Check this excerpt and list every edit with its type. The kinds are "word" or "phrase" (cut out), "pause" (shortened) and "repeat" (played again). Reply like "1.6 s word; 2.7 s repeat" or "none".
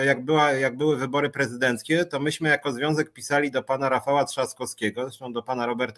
none